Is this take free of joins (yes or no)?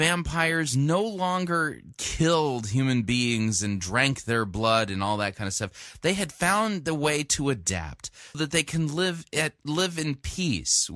no